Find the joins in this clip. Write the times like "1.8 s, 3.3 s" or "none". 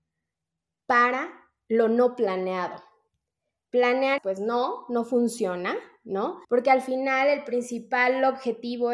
4.2 s, 6.4 s